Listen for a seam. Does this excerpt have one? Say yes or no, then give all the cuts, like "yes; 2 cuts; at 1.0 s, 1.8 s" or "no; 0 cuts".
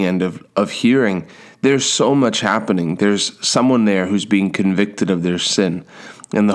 no; 0 cuts